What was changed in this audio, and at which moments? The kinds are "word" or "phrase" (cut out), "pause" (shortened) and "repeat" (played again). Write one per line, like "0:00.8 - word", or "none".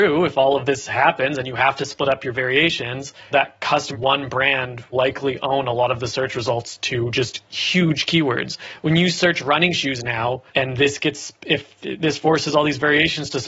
0:03.3 - word
0:03.9 - phrase
0:04.9 - word
0:10.5 - pause